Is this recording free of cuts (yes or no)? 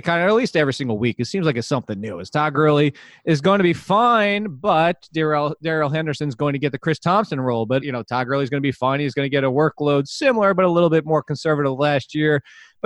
no